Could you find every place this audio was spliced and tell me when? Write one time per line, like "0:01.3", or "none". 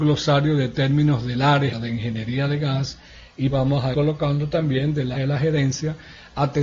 0:01.7
0:03.5
0:03.9
0:05.1